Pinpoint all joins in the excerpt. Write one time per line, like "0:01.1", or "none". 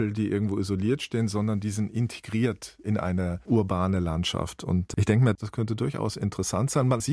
none